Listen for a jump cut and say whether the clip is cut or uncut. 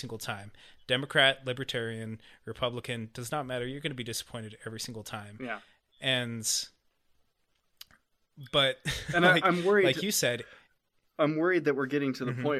uncut